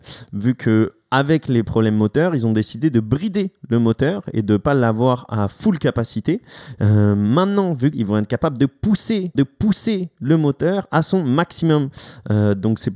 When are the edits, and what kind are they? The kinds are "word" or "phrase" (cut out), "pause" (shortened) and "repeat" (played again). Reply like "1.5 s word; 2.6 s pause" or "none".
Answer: 7.9 s phrase; 9.3 s repeat